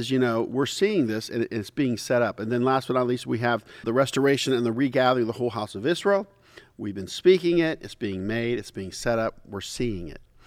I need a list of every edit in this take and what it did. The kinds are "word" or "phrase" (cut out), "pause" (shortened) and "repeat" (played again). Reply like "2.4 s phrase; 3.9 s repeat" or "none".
3.8 s word